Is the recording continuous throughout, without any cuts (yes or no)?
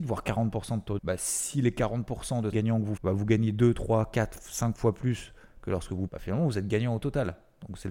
no